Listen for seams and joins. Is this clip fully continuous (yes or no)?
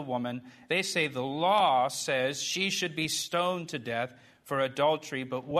yes